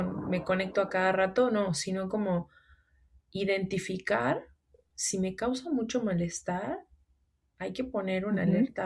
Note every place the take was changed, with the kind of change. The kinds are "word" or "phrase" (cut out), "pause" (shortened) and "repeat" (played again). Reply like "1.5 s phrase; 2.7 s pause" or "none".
none